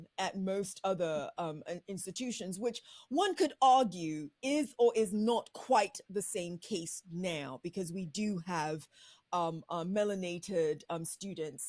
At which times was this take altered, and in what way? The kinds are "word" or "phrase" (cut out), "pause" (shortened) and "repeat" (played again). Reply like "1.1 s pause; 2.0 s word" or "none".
none